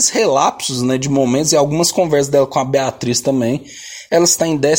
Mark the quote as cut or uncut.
uncut